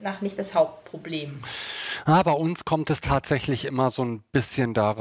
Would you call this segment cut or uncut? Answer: uncut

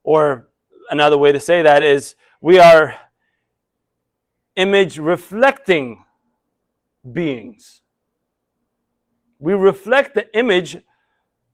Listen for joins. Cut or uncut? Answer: uncut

